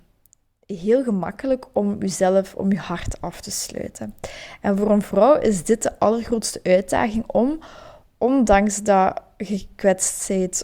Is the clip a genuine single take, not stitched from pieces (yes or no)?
yes